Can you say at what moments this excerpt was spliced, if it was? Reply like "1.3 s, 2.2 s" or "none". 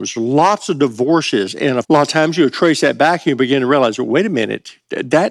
1.8 s